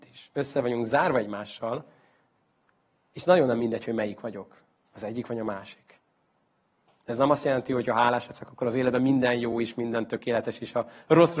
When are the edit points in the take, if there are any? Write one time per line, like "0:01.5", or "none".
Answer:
none